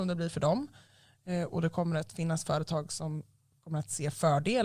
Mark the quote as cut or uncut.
uncut